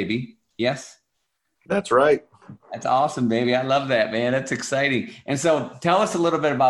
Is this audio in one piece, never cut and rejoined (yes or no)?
yes